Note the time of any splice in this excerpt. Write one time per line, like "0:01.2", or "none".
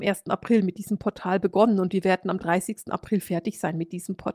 none